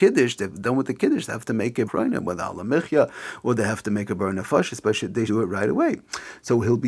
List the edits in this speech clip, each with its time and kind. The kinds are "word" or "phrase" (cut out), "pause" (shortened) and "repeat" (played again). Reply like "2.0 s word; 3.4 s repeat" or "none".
1.9 s word; 5.3 s word

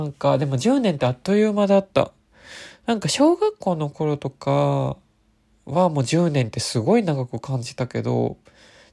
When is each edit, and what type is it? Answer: none

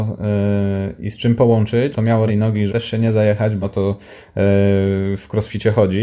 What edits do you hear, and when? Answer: 1.9 s word; 2.3 s word; 2.7 s word; 3.6 s word

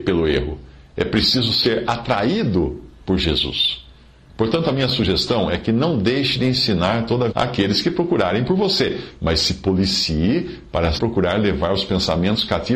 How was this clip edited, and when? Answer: 7.3 s word; 11.0 s word

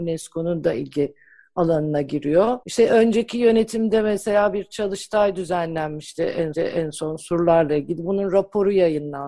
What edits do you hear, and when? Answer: 2.6 s pause; 6.5 s repeat

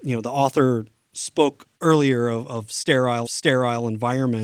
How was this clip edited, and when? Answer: 1.7 s pause; 3.2 s repeat

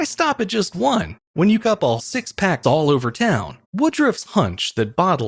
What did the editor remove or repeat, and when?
1.6 s phrase; 2.0 s word; 2.6 s phrase; 3.6 s pause

